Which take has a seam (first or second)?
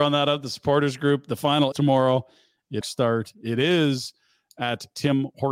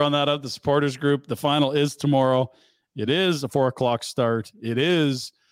first